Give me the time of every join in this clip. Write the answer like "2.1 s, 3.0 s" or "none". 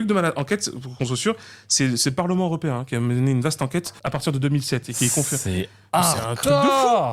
4.0 s